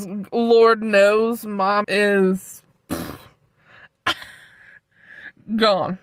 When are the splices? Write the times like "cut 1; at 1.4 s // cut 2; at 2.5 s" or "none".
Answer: cut 1; at 1.8 s